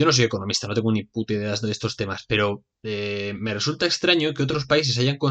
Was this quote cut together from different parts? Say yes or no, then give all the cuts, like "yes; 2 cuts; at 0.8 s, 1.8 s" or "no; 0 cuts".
yes; 1 cut; at 2.7 s